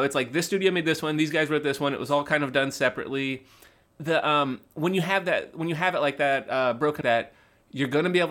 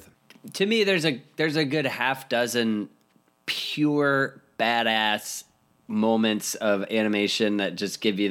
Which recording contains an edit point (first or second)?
first